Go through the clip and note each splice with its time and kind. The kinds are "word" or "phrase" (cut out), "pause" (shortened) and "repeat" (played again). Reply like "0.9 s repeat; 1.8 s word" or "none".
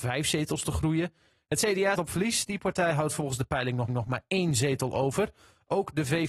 1.9 s word; 3.9 s repeat